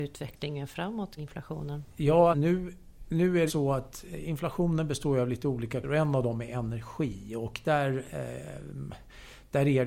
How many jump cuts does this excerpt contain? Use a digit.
4